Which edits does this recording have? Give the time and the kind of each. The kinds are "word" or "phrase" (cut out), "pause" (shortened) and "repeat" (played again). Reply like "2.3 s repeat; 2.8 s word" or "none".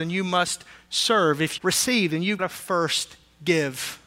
1.6 s phrase; 2.4 s word